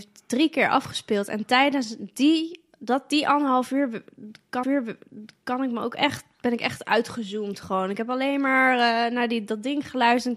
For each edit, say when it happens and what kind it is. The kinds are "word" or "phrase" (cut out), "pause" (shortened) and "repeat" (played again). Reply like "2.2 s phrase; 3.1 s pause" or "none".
4.6 s repeat